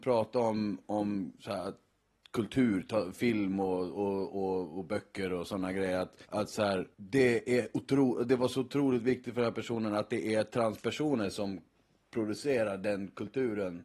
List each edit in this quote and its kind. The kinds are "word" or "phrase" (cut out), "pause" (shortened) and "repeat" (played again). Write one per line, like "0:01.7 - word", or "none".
0:01.4 - pause
0:06.2 - pause
0:06.9 - pause